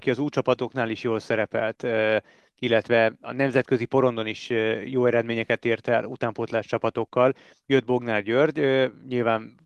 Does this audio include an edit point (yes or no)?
no